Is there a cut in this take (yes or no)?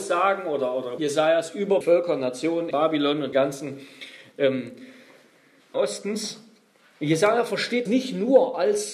yes